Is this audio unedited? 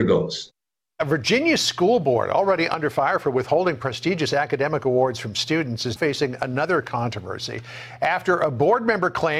no; 1 cut; at 6.0 s

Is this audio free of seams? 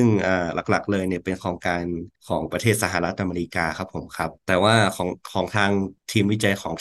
no; 2 cuts; at 2.2 s, 4.4 s

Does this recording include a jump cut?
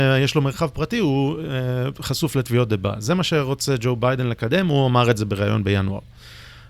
no; 0 cuts

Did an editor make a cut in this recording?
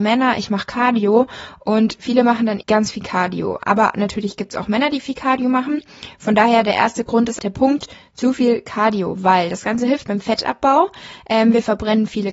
yes; 3 cuts; at 2.6 s, 7.4 s, 10.0 s

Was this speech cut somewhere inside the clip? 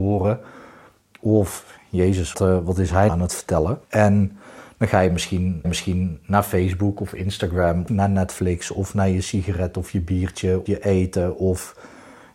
yes; 6 cuts; at 2.3 s, 3.1 s, 3.8 s, 5.6 s, 7.9 s, 10.7 s

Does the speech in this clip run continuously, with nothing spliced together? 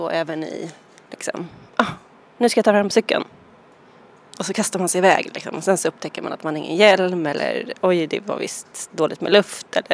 yes; 0 cuts

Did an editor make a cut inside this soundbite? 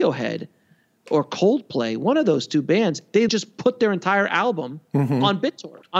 yes; 1 cut; at 3.3 s

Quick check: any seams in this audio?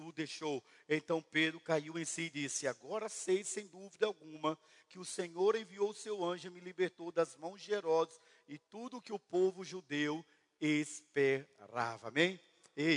no; 0 cuts

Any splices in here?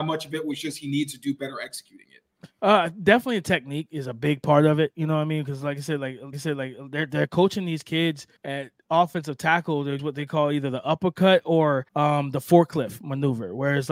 yes; 4 cuts; at 6.3 s, 8.4 s, 10.0 s, 11.9 s

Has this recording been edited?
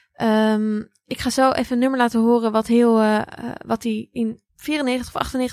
yes; 1 cut; at 4.5 s

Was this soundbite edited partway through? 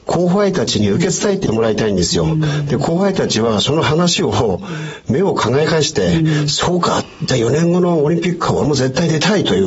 no; 0 cuts

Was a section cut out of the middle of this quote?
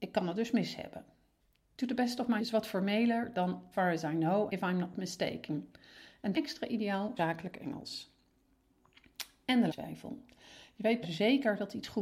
yes; 7 cuts; at 2.4 s, 3.7 s, 4.5 s, 6.3 s, 7.2 s, 9.7 s, 11.0 s

